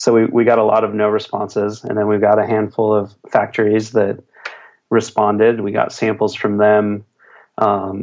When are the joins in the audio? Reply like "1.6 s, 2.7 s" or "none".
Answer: none